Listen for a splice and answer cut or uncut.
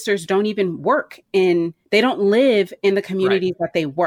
cut